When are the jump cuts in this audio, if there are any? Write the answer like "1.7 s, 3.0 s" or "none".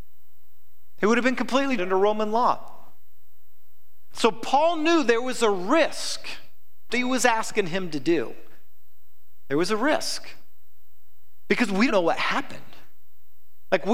1.8 s, 6.9 s, 11.9 s

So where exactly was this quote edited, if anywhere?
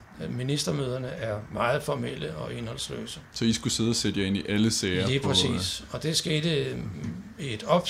none

